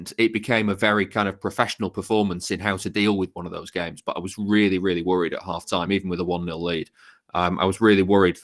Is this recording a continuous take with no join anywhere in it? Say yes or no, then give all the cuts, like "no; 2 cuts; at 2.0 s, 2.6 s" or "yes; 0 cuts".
yes; 0 cuts